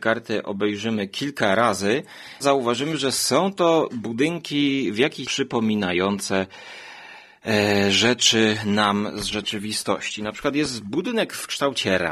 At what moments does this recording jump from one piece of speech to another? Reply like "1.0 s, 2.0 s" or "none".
2.4 s, 5.2 s